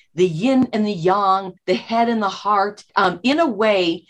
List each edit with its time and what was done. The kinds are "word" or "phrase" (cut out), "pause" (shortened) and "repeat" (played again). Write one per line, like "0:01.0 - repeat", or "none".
0:01.6 - pause
0:02.9 - pause